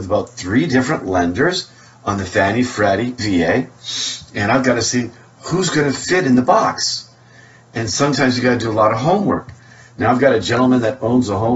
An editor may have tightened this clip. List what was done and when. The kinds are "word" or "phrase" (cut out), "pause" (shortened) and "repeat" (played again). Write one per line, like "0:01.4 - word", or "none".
0:03.2 - word